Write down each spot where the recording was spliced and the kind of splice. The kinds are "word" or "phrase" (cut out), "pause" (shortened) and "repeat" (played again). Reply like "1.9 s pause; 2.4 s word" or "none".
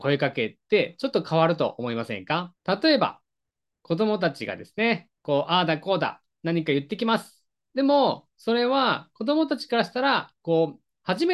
2.6 s pause; 5.2 s pause